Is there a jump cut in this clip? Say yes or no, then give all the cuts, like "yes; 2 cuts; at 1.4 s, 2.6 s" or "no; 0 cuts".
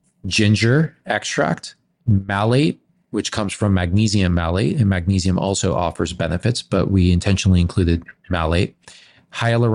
no; 0 cuts